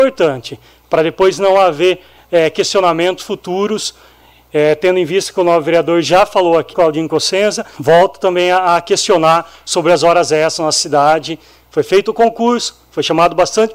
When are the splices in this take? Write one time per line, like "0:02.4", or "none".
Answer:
0:06.7
0:07.8